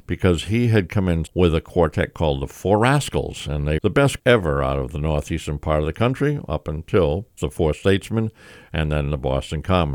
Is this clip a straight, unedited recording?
no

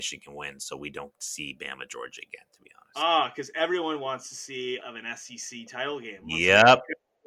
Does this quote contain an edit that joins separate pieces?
yes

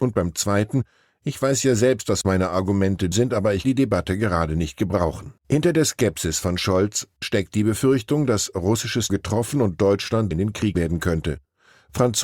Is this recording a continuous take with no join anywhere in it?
no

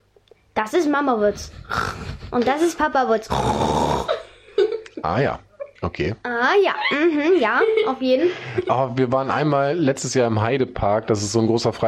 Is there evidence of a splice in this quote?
yes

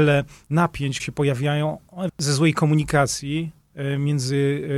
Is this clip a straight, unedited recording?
no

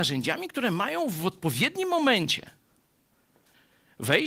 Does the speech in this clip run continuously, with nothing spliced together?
yes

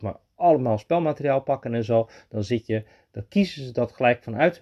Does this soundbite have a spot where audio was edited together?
no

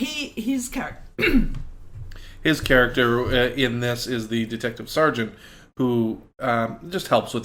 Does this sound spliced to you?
no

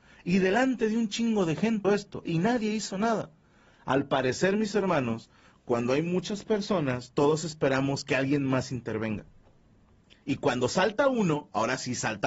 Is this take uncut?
no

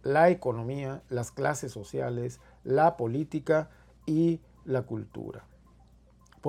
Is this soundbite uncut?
yes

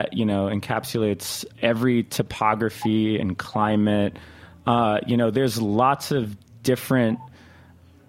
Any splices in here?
no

